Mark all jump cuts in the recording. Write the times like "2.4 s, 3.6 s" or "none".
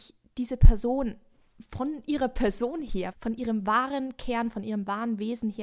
3.1 s